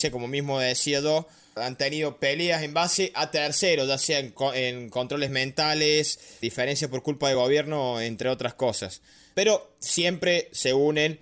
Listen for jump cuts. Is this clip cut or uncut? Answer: uncut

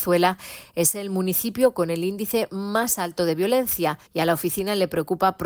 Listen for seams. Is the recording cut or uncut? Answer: cut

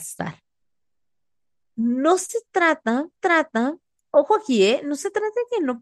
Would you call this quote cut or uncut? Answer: cut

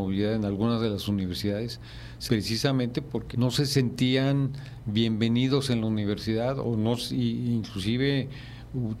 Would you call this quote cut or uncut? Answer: cut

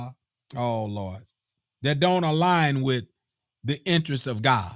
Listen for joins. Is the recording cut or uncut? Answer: uncut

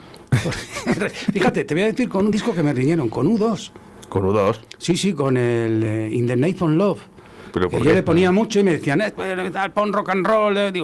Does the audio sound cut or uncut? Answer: uncut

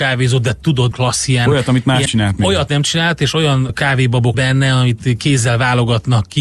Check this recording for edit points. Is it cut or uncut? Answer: cut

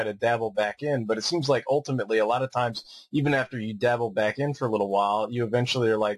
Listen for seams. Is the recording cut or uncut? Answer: uncut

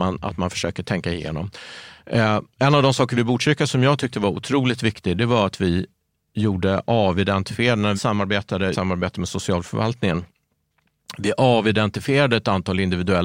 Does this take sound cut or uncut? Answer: cut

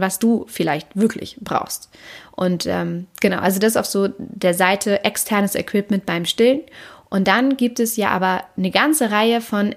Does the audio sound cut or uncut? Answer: uncut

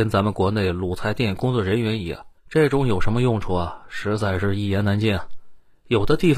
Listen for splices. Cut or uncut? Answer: cut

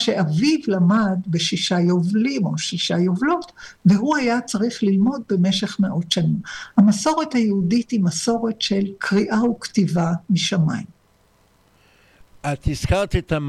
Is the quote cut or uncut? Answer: uncut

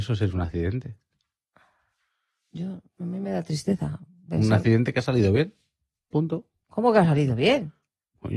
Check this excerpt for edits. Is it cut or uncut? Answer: uncut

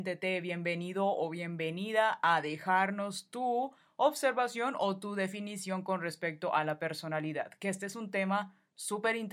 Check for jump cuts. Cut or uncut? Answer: uncut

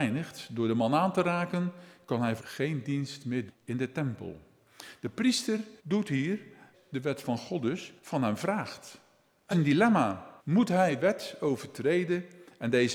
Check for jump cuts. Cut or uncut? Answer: cut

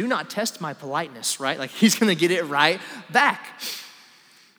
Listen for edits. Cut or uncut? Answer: uncut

